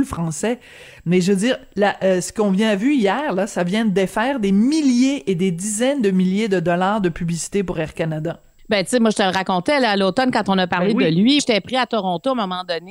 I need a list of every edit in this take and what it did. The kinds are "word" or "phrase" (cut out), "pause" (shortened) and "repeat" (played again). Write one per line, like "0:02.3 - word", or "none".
0:11.4 - word